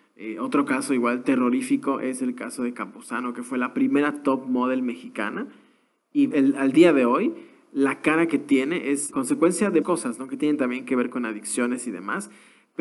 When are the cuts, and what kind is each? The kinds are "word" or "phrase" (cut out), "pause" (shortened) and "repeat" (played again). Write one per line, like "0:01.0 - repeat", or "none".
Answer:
0:02.7 - word
0:06.3 - word
0:09.1 - word
0:09.8 - word

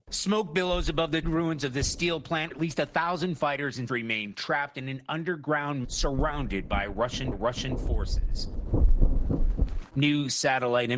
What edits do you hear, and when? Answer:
0:01.2 - word
0:02.5 - word
0:03.9 - word
0:05.8 - word
0:07.3 - repeat

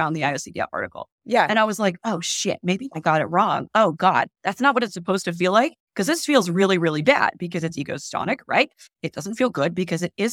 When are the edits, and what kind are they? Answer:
none

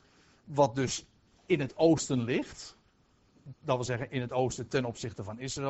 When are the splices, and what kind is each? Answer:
none

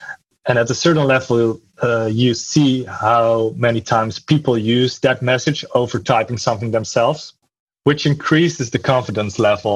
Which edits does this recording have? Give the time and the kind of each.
none

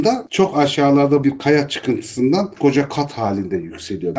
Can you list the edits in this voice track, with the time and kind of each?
0:01.2 - word
0:02.6 - word

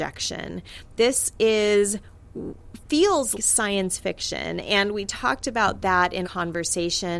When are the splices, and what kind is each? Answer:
0:03.3 - word
0:06.2 - word

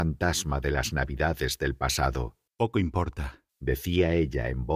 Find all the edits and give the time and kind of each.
0:02.5 - pause
0:03.5 - pause

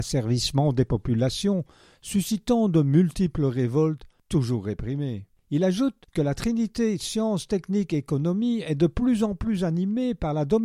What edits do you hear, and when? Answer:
none

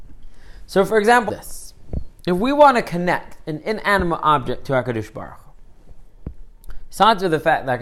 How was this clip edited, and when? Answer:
0:01.3 - word

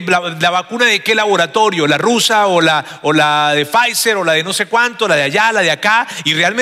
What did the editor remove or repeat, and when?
none

